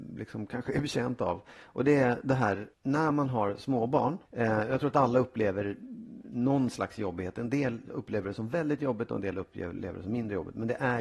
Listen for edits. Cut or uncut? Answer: cut